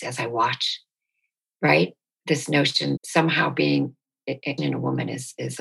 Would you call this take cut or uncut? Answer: cut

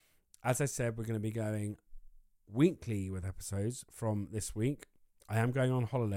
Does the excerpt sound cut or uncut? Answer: uncut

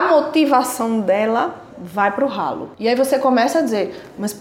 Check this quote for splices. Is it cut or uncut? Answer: cut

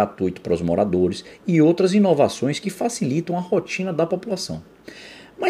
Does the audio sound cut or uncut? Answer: uncut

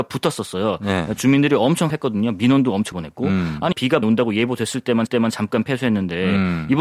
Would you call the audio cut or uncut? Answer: cut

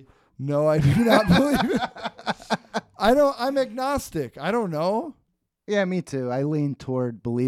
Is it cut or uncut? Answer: cut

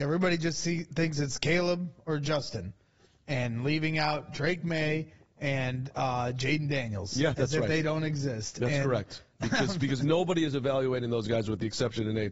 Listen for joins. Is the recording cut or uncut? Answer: uncut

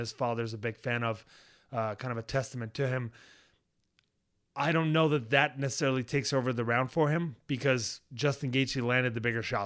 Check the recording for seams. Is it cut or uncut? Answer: uncut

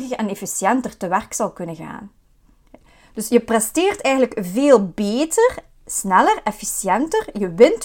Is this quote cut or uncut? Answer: uncut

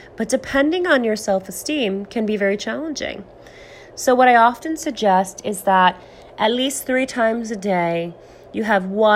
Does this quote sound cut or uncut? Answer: uncut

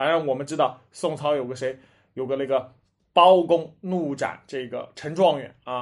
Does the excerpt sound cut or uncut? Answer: uncut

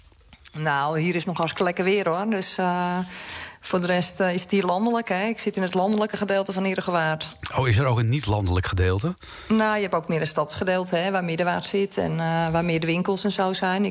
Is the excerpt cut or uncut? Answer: uncut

